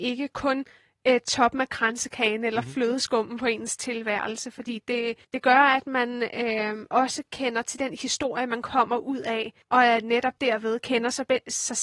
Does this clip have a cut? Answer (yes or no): yes